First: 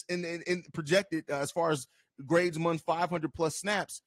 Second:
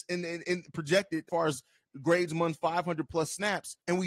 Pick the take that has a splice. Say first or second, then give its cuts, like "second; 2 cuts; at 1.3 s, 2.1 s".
second; 1 cut; at 1.3 s